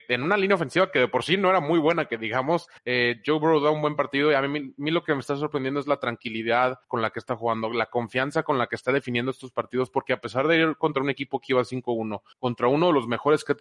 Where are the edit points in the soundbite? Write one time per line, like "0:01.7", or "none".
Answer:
0:02.8
0:06.8
0:12.3